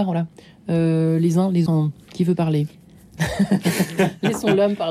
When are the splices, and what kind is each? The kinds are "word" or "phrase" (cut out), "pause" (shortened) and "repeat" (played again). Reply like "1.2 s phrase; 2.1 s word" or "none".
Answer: 1.7 s word; 3.2 s phrase

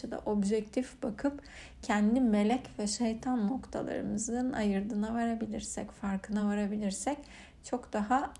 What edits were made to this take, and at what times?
none

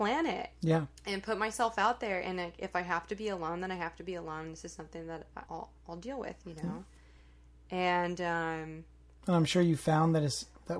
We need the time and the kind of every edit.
1.0 s pause; 5.5 s word

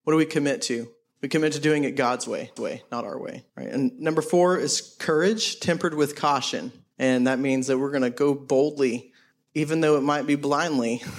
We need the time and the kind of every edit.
2.6 s repeat; 3.5 s pause; 6.9 s pause; 9.3 s pause

